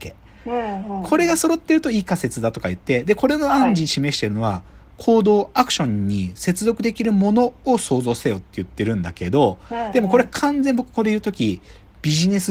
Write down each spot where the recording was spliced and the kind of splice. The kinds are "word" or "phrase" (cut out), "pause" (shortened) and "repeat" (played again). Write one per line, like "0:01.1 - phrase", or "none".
none